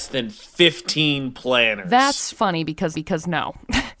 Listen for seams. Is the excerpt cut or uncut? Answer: cut